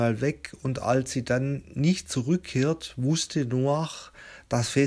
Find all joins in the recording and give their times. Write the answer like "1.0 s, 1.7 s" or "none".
none